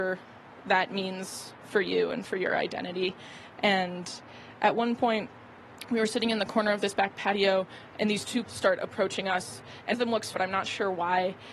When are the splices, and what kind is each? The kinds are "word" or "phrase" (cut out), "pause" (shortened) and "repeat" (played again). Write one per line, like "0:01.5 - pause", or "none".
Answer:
0:08.4 - word
0:09.9 - word
0:10.3 - word